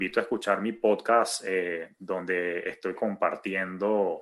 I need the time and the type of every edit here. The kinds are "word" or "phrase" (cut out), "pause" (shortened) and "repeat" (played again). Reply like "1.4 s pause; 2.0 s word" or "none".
3.0 s word